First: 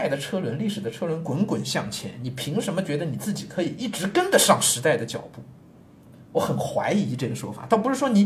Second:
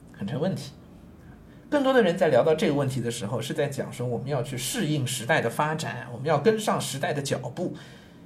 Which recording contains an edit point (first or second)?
first